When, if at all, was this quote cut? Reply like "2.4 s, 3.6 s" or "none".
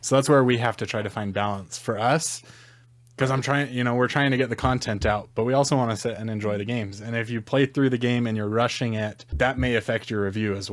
none